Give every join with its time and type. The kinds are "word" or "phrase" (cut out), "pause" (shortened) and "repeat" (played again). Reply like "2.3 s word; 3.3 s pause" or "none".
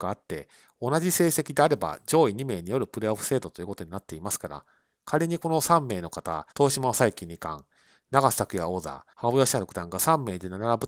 6.5 s pause; 9.1 s pause

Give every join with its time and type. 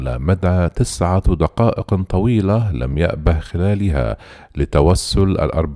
none

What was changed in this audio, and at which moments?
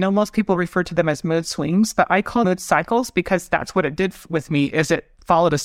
2.4 s word

